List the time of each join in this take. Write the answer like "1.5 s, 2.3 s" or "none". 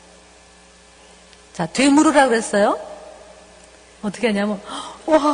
none